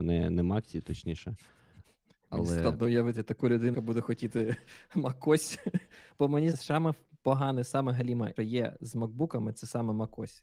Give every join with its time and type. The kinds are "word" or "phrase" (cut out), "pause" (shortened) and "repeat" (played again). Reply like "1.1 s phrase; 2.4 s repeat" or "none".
3.7 s word; 6.5 s word; 8.4 s word